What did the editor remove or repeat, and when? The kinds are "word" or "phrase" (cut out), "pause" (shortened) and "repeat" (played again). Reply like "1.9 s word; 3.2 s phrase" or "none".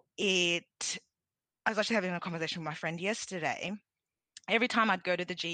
none